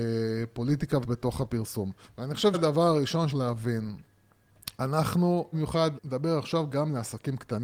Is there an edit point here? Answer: yes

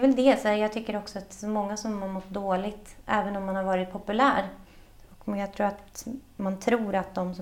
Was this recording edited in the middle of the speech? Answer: no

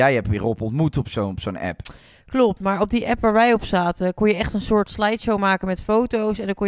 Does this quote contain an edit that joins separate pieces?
no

